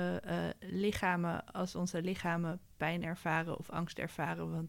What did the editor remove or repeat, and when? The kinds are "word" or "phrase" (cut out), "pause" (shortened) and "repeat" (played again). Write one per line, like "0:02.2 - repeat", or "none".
none